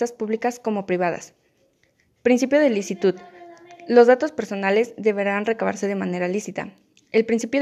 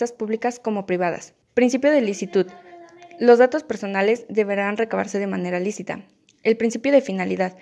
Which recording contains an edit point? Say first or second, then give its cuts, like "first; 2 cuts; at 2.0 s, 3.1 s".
second; 1 cut; at 1.4 s